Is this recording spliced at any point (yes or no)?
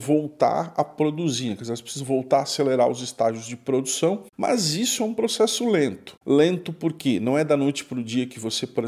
no